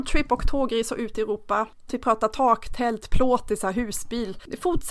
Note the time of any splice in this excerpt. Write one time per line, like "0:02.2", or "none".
0:01.9